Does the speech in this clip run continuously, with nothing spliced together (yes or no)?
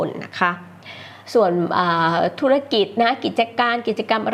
no